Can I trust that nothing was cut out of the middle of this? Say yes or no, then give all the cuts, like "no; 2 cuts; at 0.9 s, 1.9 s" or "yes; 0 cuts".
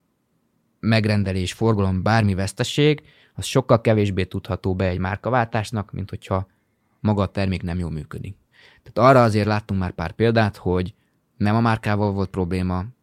yes; 0 cuts